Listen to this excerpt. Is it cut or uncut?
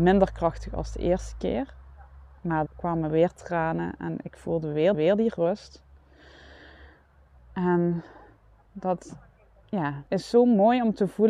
cut